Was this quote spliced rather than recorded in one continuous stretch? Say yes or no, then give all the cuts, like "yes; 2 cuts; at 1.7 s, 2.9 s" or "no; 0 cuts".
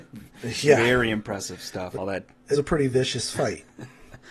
yes; 2 cuts; at 1.9 s, 2.5 s